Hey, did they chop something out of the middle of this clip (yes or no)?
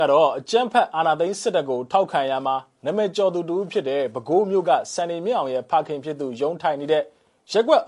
no